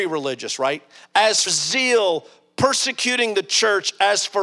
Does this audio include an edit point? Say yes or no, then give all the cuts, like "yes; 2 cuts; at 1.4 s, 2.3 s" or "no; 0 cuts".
yes; 1 cut; at 1.5 s